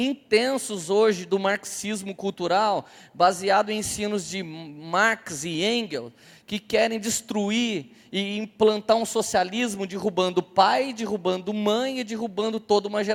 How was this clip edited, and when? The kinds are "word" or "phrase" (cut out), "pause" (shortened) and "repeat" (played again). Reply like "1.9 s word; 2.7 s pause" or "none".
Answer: none